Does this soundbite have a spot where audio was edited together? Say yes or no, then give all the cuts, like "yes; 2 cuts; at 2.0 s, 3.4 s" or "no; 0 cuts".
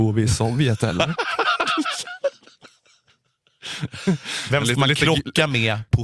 no; 0 cuts